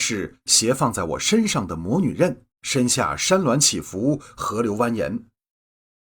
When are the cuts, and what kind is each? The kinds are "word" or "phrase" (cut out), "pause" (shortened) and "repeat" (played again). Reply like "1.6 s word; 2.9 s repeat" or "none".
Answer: 2.5 s pause